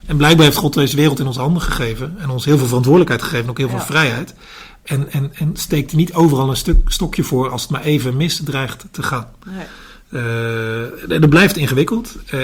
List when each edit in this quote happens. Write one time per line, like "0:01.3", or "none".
none